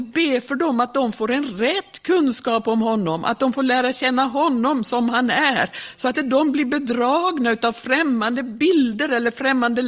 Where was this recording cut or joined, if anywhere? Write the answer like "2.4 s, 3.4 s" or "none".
6.1 s